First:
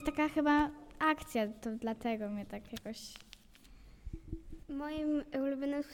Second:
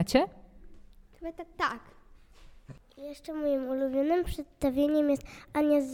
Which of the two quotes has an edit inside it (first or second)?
first